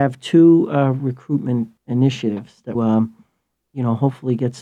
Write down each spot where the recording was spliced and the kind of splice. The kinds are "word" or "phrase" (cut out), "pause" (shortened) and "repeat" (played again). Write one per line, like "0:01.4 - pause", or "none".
0:01.8 - pause
0:02.7 - phrase